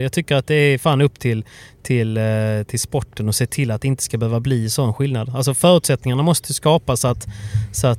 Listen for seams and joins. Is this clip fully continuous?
yes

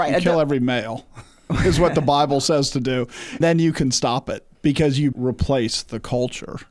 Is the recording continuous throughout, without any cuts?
no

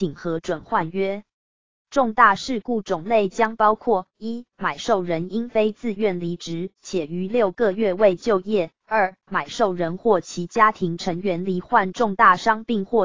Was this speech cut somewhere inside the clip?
no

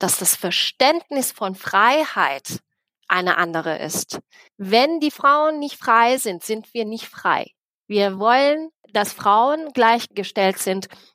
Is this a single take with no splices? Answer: yes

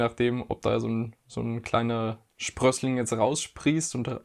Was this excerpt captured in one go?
yes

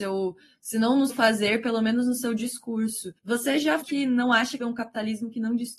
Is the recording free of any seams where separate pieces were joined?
no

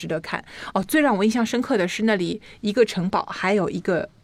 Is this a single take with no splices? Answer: yes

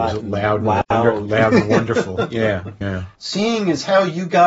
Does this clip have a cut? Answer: yes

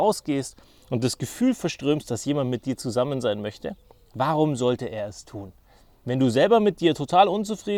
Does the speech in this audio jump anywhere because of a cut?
no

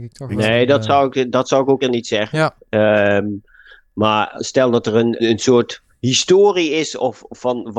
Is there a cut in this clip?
yes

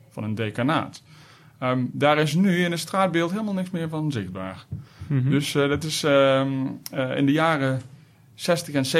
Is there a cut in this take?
no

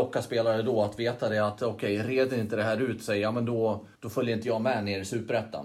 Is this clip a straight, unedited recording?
no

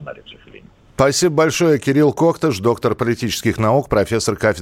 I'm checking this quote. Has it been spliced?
no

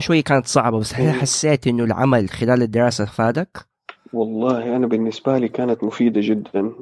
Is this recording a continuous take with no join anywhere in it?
yes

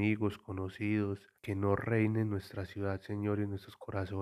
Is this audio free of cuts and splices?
no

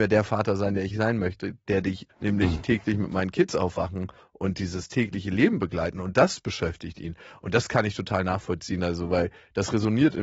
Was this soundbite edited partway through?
yes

